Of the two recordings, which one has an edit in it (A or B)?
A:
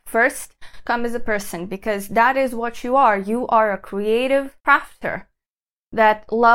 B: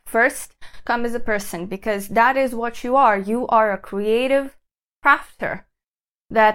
A